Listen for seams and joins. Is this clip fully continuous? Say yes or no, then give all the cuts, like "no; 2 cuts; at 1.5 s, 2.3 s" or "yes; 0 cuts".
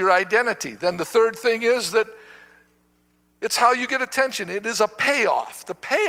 yes; 0 cuts